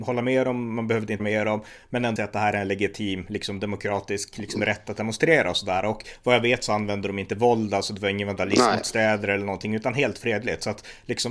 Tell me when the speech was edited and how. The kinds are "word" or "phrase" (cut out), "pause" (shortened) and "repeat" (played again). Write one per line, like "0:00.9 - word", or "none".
0:01.2 - word
0:02.2 - word